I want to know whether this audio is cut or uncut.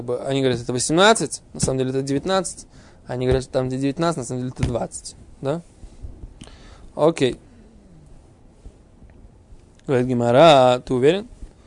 uncut